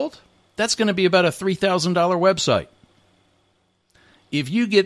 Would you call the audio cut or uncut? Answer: uncut